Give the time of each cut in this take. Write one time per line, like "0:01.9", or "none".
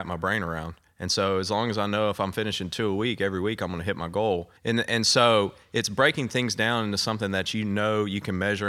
0:04.6